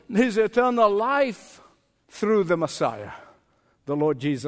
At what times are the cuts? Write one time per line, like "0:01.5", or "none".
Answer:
none